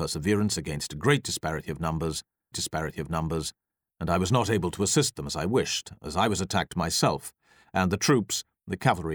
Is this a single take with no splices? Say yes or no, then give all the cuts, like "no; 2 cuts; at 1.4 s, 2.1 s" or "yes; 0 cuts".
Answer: no; 1 cut; at 2.5 s